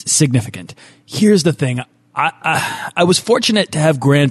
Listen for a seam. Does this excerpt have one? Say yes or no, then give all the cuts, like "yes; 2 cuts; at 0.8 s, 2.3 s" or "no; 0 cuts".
no; 0 cuts